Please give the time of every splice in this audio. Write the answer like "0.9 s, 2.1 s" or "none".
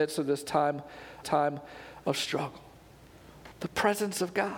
1.2 s, 3.5 s